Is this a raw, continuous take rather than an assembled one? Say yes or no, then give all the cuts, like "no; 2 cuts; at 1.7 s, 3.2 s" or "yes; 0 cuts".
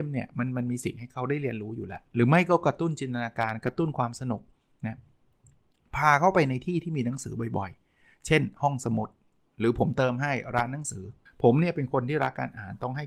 no; 1 cut; at 11.3 s